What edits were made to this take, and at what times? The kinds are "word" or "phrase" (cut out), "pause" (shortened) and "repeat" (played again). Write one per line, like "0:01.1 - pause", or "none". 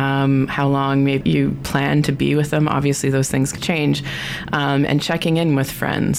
0:01.2 - word
0:03.6 - word